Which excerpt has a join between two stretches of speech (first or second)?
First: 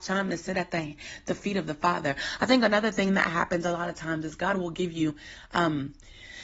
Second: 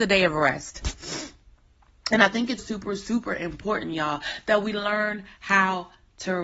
second